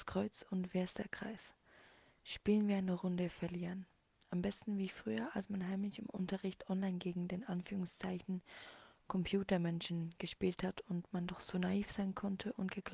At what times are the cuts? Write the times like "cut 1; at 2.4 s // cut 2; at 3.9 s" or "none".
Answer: none